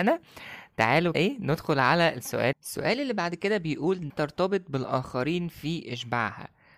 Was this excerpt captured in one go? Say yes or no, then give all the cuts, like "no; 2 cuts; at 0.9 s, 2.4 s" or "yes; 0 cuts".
no; 3 cuts; at 1.1 s, 2.5 s, 4.1 s